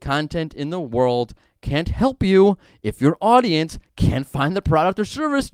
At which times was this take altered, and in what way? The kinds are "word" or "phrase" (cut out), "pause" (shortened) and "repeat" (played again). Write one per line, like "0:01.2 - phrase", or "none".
none